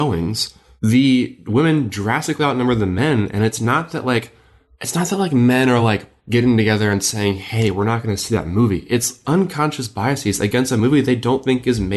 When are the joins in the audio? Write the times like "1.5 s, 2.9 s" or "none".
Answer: none